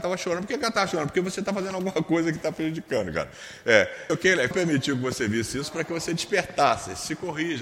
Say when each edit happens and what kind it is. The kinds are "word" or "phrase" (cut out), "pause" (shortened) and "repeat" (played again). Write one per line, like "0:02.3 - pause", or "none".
0:04.1 - word
0:04.5 - phrase